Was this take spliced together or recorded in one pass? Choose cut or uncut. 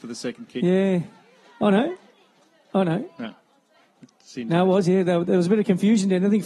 uncut